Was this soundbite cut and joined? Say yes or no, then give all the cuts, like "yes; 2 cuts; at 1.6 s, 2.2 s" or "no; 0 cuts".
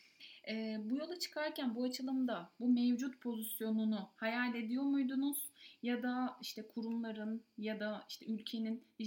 no; 0 cuts